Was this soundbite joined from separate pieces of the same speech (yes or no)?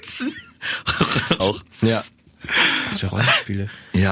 yes